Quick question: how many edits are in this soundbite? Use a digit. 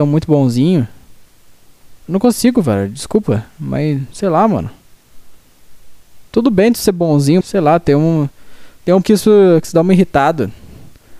4